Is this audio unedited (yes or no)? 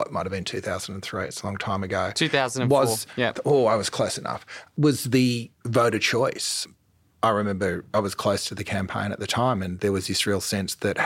yes